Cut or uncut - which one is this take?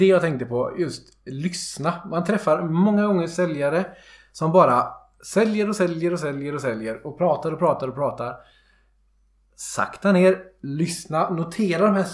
uncut